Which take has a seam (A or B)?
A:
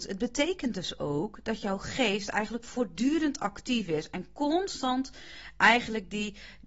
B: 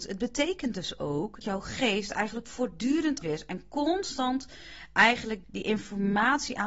B